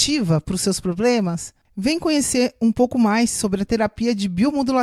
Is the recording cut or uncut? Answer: uncut